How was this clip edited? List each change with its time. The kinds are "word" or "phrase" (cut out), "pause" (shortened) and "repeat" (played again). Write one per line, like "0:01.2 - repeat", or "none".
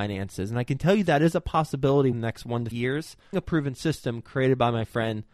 0:02.1 - word
0:02.7 - word
0:03.3 - word